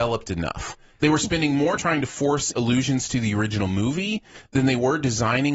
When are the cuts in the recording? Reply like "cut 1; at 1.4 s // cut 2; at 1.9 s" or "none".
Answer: cut 1; at 1.8 s // cut 2; at 2.5 s